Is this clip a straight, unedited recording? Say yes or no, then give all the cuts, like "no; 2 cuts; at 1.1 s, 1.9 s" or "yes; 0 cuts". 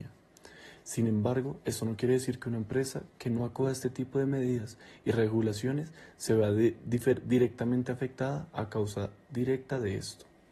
yes; 0 cuts